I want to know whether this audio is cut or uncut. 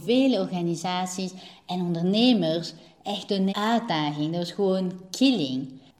cut